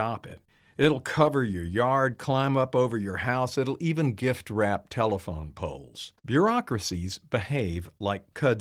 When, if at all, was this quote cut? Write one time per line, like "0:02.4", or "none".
0:06.2

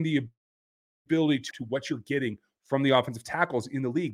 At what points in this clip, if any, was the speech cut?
0:01.5

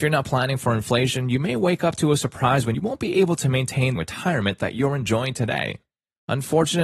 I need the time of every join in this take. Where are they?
0:02.7
0:04.0

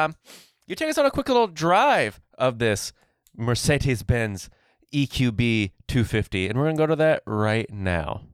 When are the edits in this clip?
none

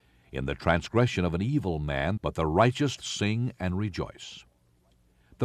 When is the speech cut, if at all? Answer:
0:02.2
0:03.0

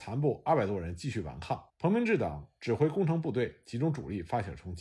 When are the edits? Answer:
0:01.7

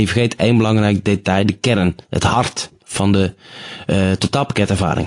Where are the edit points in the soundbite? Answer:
0:02.0
0:02.8

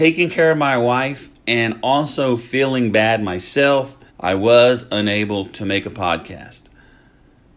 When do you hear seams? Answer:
0:01.4
0:04.1

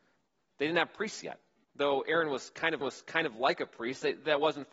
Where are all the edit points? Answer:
0:01.6
0:02.8

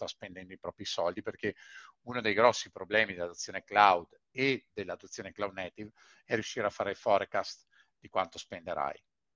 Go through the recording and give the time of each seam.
none

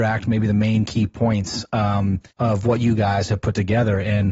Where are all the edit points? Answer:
0:02.3

